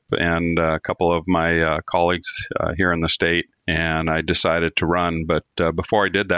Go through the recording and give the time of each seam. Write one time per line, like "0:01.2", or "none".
none

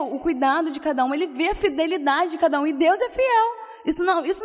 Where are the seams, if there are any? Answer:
none

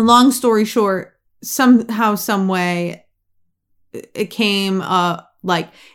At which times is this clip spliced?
none

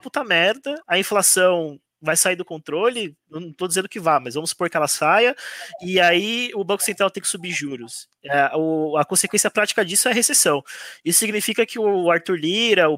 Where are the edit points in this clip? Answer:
none

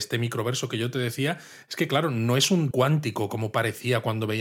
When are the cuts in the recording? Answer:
0:02.7

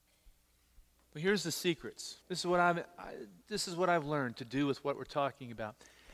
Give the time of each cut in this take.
0:02.2

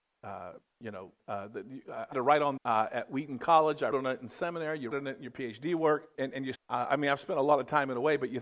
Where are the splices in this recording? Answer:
0:01.2
0:02.1
0:02.6
0:03.9
0:04.9
0:06.1
0:06.5

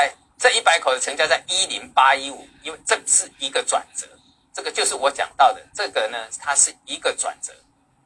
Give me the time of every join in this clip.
none

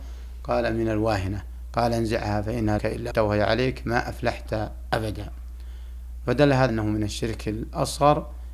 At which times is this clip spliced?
0:02.8
0:03.1
0:06.7

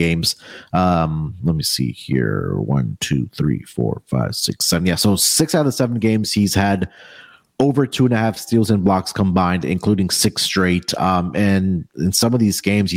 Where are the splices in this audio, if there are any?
none

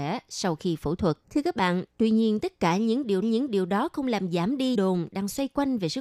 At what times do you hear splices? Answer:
0:01.2
0:03.2
0:04.7

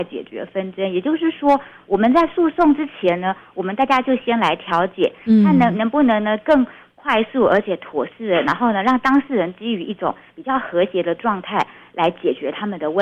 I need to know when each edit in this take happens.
none

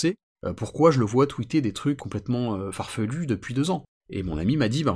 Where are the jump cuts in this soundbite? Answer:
0:02.0

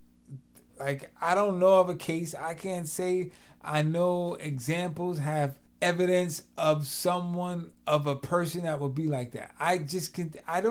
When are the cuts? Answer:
0:05.7
0:07.7

